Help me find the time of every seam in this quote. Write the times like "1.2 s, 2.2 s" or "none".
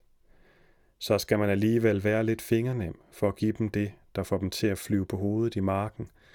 none